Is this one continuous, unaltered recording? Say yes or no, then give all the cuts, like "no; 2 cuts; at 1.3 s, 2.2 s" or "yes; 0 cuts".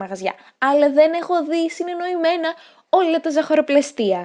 yes; 0 cuts